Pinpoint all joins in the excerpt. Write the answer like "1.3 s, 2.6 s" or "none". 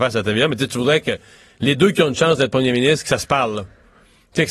none